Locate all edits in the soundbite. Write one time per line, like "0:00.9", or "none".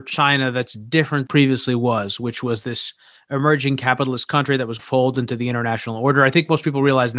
0:01.3
0:02.6
0:04.8